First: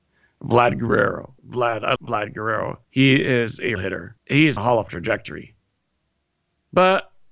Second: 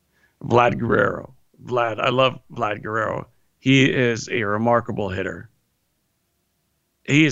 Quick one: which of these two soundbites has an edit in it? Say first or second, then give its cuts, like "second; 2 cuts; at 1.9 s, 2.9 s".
first; 7 cuts; at 1.4 s, 2.0 s, 2.8 s, 3.8 s, 4.2 s, 4.6 s, 4.9 s